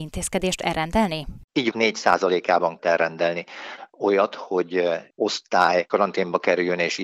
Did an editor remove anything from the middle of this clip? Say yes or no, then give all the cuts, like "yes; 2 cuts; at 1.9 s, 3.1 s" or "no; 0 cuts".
yes; 3 cuts; at 1.7 s, 2.8 s, 5.1 s